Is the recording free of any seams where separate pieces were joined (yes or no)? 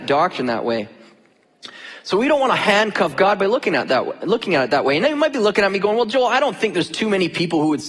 yes